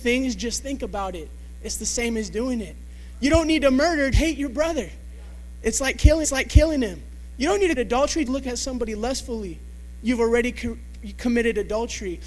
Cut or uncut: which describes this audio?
cut